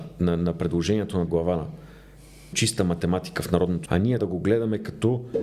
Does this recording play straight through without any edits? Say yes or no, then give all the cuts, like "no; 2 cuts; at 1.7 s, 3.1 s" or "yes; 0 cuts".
no; 4 cuts; at 1.3 s, 2.5 s, 3.9 s, 4.2 s